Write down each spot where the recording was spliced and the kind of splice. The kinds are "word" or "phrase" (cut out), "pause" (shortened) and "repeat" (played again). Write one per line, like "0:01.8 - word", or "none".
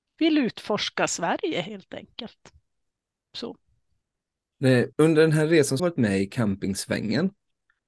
0:04.9 - pause
0:05.8 - phrase